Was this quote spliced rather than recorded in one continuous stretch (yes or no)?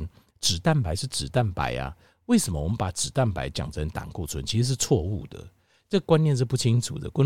no